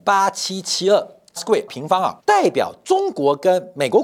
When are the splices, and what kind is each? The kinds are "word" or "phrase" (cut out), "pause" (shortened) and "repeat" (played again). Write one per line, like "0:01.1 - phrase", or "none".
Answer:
0:01.4 - word
0:01.7 - word
0:02.2 - pause